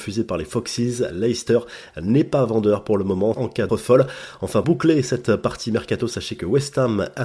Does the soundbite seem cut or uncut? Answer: cut